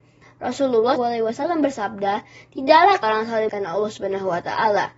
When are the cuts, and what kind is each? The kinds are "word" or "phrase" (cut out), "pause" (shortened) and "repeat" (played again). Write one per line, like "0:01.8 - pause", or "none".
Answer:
0:01.0 - word
0:03.0 - word
0:03.5 - word